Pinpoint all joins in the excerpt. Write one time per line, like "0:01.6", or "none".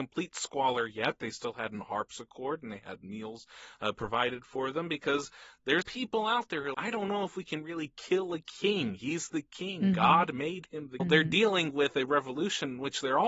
0:05.8
0:06.7
0:11.0